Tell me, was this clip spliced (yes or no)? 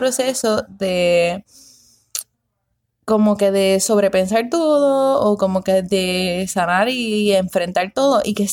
no